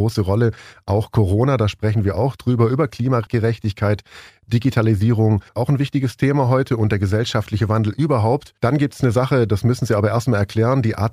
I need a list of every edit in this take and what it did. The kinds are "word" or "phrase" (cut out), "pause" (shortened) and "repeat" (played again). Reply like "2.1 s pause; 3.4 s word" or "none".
5.5 s pause; 8.6 s pause